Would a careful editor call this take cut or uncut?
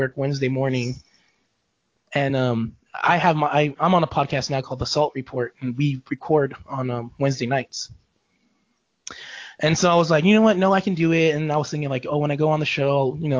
uncut